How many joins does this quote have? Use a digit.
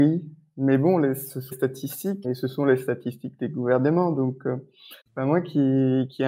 3